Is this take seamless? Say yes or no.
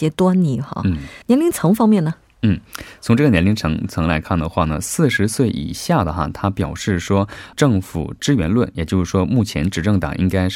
no